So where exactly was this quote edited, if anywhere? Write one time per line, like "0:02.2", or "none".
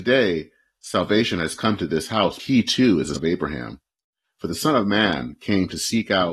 0:02.4
0:03.1